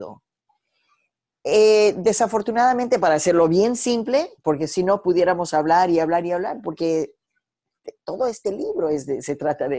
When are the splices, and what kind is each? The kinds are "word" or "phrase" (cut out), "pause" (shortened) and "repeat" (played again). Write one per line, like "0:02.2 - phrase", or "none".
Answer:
0:04.4 - pause